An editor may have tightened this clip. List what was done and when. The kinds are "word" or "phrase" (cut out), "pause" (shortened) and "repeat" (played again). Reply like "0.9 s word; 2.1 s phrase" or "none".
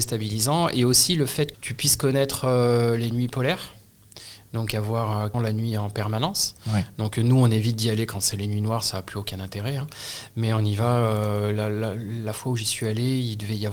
1.5 s word; 5.3 s word

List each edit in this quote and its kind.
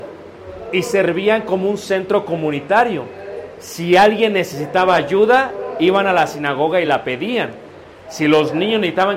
none

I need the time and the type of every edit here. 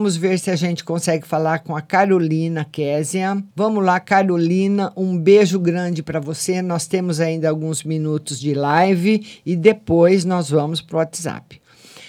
3.5 s pause

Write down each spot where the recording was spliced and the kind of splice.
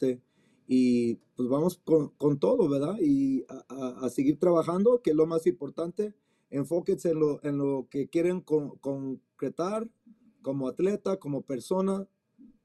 none

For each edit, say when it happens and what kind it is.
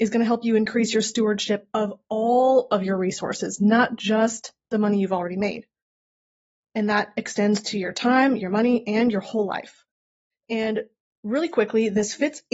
none

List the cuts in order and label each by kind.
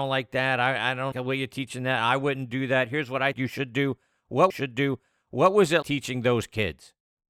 1.1 s word; 3.3 s word; 4.5 s repeat; 5.8 s word

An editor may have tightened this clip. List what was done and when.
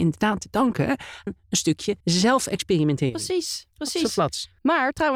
1.3 s word; 2.0 s pause

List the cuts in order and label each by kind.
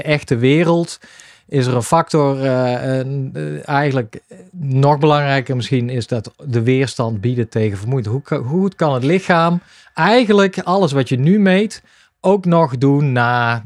none

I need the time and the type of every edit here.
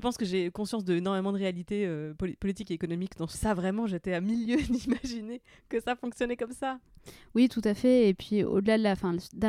3.3 s phrase

